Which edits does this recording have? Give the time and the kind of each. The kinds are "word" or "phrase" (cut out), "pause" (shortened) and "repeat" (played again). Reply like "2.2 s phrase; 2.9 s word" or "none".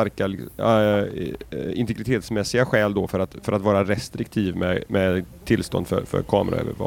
none

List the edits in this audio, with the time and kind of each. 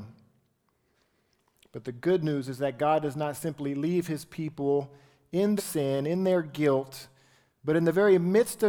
5.6 s word

